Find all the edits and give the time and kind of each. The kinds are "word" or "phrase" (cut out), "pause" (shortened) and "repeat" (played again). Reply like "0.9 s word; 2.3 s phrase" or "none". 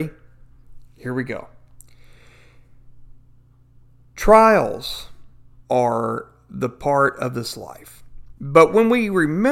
5.6 s pause; 8.4 s pause